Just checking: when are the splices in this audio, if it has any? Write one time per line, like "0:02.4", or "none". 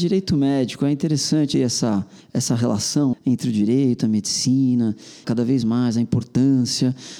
0:01.5
0:02.2
0:03.1
0:05.2